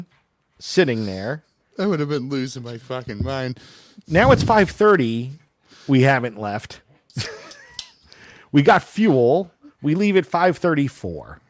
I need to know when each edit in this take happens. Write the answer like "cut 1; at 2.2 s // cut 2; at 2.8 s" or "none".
none